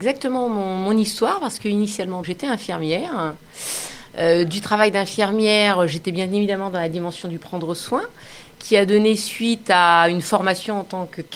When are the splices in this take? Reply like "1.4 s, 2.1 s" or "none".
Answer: 2.2 s